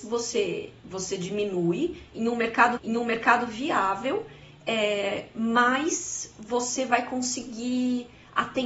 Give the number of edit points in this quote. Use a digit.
1